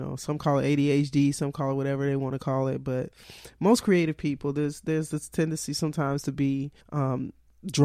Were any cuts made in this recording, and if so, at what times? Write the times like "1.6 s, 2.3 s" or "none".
6.8 s

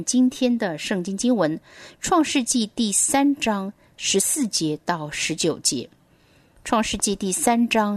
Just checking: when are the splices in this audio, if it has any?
none

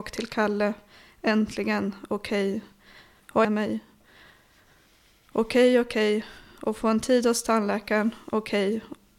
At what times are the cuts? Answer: 3.4 s

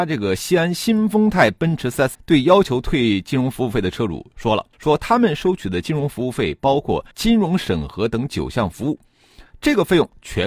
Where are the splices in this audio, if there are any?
2.1 s, 4.7 s, 7.1 s

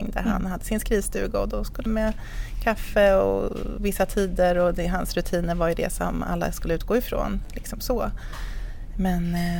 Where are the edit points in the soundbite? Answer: 1.9 s

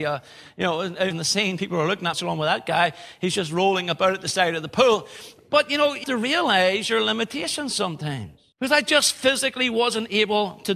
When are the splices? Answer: 1.1 s, 2.1 s, 6.0 s, 8.5 s

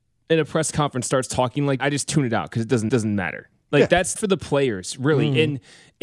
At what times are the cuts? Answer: 1.8 s, 2.9 s, 4.2 s

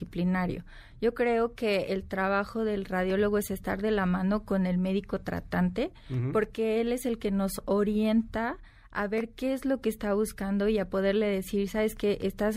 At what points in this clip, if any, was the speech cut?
none

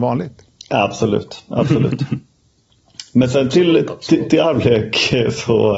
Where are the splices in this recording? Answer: 4.4 s

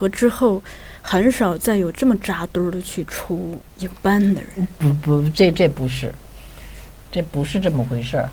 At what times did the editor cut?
3.7 s

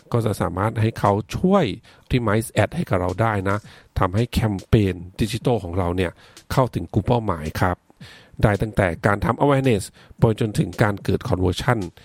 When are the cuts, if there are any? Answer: 2.1 s

